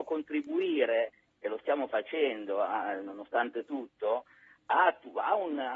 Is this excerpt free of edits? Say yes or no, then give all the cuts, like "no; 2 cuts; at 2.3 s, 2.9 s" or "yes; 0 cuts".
yes; 0 cuts